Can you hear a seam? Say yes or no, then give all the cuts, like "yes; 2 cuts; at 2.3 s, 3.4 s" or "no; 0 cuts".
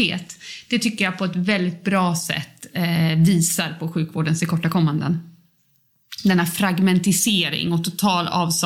no; 0 cuts